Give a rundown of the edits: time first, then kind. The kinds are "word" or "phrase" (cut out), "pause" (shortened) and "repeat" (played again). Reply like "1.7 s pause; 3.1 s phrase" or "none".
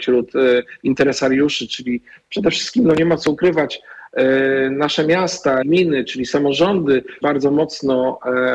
5.6 s word; 7.2 s word